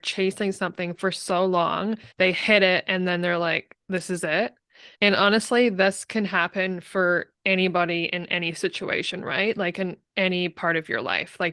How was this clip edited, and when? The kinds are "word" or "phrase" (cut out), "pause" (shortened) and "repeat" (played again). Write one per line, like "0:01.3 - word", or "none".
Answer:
0:02.1 - pause
0:03.8 - pause
0:04.9 - pause
0:07.4 - pause